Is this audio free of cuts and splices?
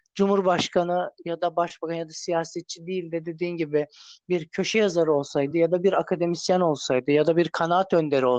yes; 0 cuts

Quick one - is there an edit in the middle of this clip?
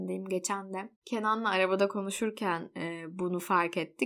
yes; 1 cut; at 1.0 s

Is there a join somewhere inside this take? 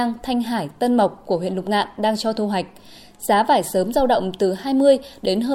no; 0 cuts

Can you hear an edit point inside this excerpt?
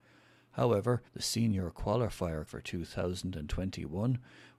yes; 2 cuts; at 1.1 s, 2.5 s

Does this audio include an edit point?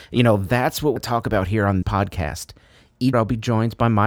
yes; 3 cuts; at 1.0 s, 1.8 s, 3.1 s

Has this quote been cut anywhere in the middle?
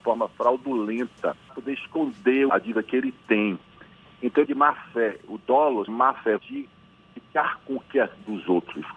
yes; 5 cuts; at 1.5 s, 2.5 s, 4.4 s, 5.9 s, 6.4 s

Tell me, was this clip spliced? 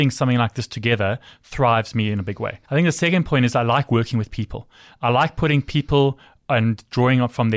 yes; 1 cut; at 2.6 s

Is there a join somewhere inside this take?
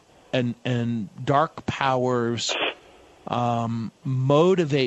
no; 0 cuts

